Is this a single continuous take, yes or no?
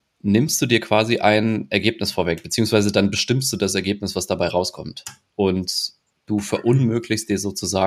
yes